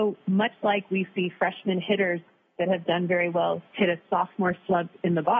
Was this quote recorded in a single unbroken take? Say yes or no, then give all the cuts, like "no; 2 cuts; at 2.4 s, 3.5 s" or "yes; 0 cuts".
yes; 0 cuts